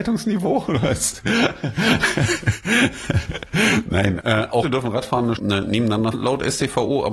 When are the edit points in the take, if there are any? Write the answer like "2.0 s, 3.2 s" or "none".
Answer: 4.2 s, 4.6 s, 5.4 s, 6.1 s